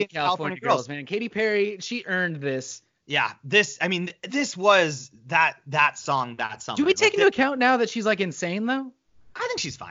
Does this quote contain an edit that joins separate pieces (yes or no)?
no